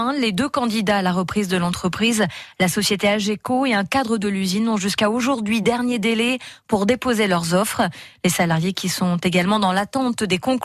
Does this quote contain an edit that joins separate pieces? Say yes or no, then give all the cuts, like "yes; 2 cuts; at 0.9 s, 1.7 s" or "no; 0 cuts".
no; 0 cuts